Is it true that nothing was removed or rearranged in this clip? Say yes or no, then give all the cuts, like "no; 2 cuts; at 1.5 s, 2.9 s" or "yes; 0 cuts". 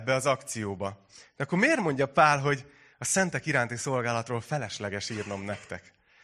yes; 0 cuts